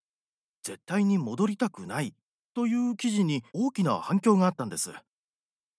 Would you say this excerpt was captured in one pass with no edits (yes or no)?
no